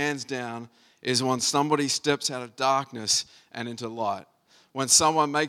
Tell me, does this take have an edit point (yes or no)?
no